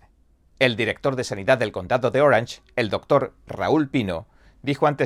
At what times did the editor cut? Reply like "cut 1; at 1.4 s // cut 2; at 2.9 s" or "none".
none